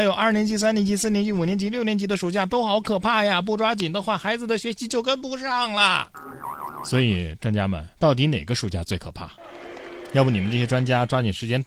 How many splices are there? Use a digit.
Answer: 1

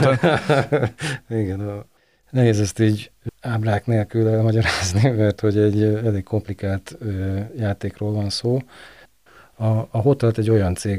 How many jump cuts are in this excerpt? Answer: 0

